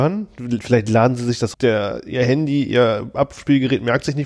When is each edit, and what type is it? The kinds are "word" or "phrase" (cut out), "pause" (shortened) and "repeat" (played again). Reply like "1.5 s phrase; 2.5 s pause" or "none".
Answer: 1.5 s phrase